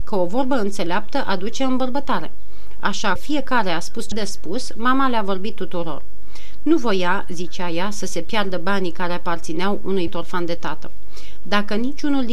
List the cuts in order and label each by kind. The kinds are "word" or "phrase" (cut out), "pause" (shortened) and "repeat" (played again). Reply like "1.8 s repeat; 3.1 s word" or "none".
3.2 s phrase; 4.1 s word; 10.1 s word